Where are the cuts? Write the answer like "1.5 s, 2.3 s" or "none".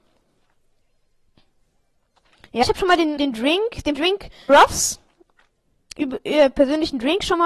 2.6 s, 3.2 s, 3.9 s, 4.5 s